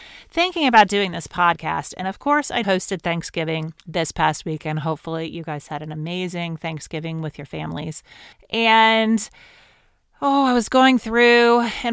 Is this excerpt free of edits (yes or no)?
no